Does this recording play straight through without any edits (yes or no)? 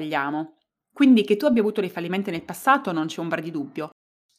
yes